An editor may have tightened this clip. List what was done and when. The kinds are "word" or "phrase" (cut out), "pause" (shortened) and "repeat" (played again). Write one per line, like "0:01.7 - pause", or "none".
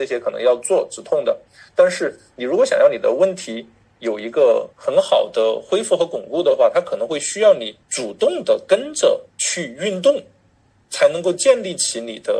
0:04.7 - pause
0:07.8 - pause
0:09.3 - pause